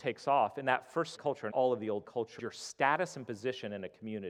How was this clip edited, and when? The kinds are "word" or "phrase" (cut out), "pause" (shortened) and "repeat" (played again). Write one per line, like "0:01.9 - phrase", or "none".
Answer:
0:01.1 - word
0:01.5 - word
0:02.0 - word
0:02.4 - word